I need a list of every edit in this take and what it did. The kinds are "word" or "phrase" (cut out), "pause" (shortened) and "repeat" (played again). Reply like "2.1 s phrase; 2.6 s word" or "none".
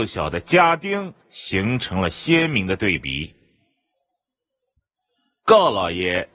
1.2 s pause